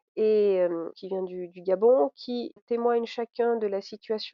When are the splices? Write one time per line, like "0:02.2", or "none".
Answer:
0:00.9
0:02.6